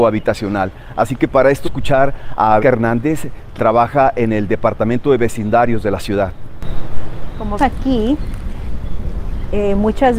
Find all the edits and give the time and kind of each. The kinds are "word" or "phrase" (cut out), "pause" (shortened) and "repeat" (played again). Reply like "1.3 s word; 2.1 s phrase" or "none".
1.6 s word; 2.6 s word; 3.6 s word; 7.6 s word